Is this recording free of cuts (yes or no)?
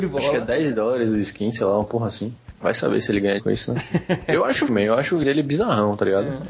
no